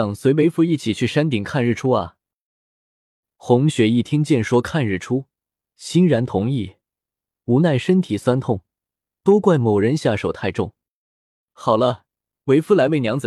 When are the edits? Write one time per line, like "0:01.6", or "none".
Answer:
none

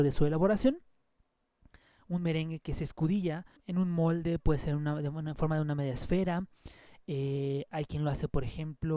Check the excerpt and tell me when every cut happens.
0:03.6

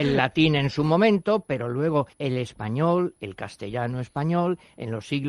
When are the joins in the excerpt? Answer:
0:02.1

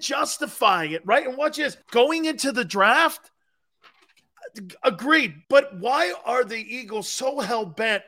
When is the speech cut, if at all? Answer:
0:01.8
0:05.4

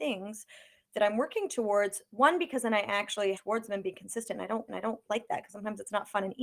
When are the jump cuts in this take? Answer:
0:03.3
0:04.7

